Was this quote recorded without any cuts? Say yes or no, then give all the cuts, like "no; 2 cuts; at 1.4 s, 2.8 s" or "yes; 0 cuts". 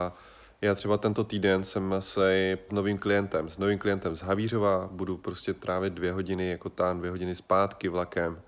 no; 1 cut; at 2.7 s